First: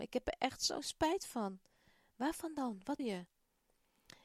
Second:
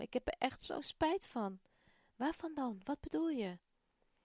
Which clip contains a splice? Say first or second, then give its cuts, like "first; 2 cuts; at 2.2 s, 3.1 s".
first; 1 cut; at 3.0 s